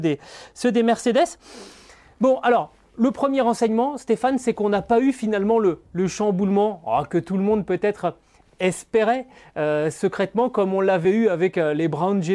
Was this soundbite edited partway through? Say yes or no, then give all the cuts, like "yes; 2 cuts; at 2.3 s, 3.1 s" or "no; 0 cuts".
no; 0 cuts